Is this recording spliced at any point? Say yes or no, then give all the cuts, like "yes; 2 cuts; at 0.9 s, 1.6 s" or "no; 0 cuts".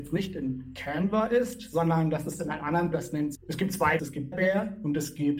yes; 4 cuts; at 2.9 s, 3.3 s, 4.0 s, 4.3 s